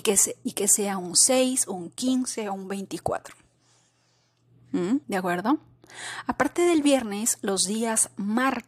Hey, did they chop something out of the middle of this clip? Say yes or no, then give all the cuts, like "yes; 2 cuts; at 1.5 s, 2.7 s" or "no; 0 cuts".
yes; 1 cut; at 5.0 s